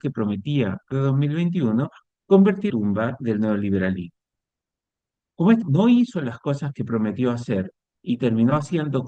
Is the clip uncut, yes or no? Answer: no